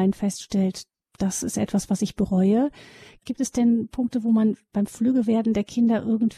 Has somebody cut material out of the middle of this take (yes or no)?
no